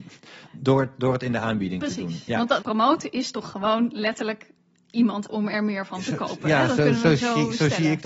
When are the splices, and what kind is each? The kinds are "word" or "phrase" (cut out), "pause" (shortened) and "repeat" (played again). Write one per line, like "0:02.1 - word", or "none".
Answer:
0:02.6 - word
0:05.3 - word